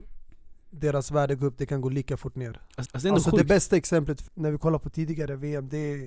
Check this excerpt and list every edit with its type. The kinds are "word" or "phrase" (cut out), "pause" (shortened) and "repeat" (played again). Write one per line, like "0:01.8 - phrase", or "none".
0:02.9 - repeat
0:04.3 - word